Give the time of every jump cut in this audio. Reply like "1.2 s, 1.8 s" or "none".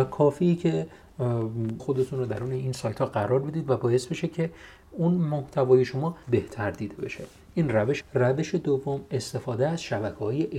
1.8 s, 6.2 s, 8.0 s